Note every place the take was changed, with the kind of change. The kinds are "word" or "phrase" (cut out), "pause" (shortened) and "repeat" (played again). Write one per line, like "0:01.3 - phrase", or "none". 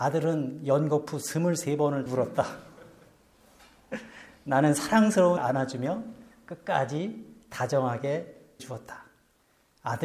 0:02.1 - word
0:05.4 - word
0:08.6 - word